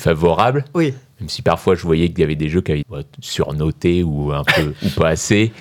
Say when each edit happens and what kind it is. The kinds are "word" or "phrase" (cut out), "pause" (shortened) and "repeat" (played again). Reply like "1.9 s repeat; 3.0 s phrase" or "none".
2.8 s word